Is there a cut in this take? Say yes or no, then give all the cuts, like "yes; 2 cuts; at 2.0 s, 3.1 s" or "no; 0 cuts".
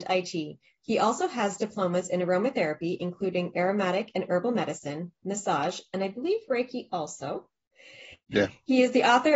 no; 0 cuts